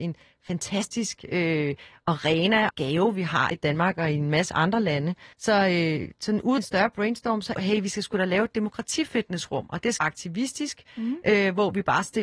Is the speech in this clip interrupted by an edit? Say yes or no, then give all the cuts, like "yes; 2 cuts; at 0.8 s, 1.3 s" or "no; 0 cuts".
yes; 6 cuts; at 2.7 s, 3.5 s, 5.3 s, 6.6 s, 7.6 s, 10.0 s